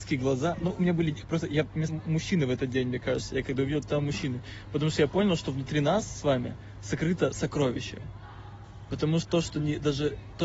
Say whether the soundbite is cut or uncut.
cut